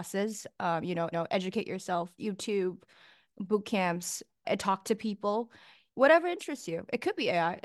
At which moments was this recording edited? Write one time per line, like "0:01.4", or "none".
0:01.1
0:02.2